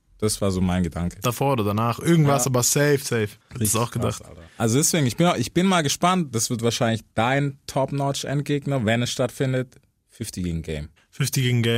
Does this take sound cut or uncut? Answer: cut